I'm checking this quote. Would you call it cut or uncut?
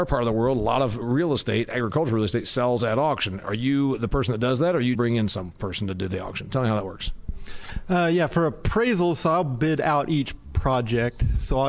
cut